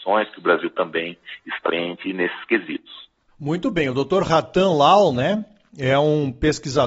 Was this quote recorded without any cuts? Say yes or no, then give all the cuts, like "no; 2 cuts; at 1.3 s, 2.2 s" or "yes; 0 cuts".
no; 1 cut; at 1.7 s